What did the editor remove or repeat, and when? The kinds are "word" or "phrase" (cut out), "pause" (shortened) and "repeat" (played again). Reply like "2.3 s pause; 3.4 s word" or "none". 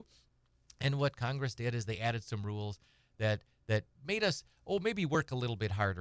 none